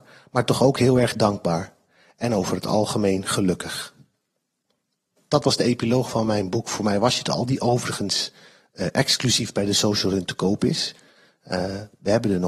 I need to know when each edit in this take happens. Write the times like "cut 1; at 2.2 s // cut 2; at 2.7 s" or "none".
none